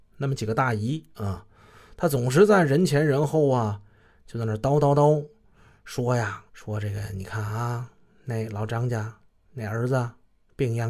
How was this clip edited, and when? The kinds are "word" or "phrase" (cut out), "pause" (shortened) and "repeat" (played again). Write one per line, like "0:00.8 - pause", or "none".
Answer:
0:06.5 - pause